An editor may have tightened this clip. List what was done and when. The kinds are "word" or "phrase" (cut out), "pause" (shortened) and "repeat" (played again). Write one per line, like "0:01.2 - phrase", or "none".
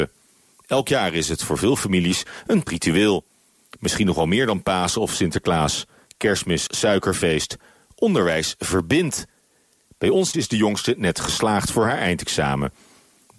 0:02.7 - word
0:06.7 - word
0:10.3 - word